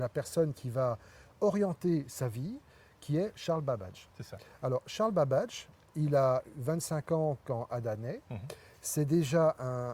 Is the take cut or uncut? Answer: uncut